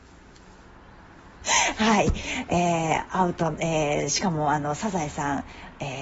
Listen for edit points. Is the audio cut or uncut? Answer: uncut